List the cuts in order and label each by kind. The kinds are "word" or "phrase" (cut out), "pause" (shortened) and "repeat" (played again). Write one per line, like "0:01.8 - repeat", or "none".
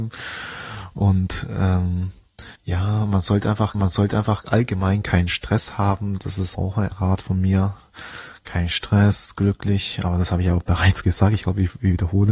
0:02.5 - pause
0:03.7 - repeat
0:06.5 - word
0:06.9 - word